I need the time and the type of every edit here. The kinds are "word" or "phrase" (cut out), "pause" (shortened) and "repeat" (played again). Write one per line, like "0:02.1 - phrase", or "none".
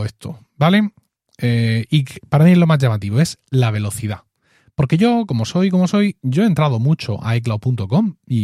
none